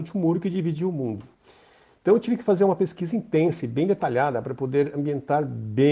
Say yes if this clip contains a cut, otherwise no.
no